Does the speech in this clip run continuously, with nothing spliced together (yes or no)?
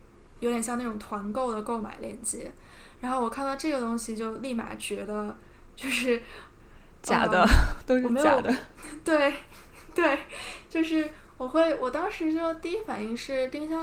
yes